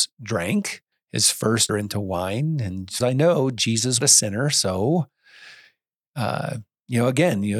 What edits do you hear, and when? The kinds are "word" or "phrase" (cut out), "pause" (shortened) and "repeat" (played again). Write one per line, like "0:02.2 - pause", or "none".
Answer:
0:00.9 - pause
0:01.7 - phrase
0:03.0 - phrase
0:04.0 - phrase